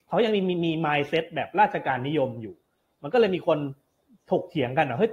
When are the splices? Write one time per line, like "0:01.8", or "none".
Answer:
none